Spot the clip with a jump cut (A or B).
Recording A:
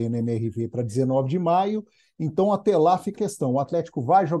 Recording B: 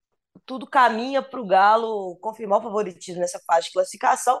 A